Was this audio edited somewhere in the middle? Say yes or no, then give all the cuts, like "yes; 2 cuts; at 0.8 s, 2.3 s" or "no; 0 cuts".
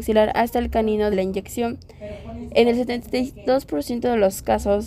yes; 1 cut; at 1.1 s